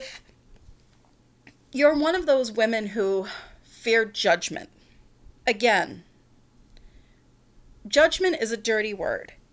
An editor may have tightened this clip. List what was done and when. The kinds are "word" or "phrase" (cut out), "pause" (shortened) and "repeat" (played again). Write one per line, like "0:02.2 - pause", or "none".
0:05.4 - pause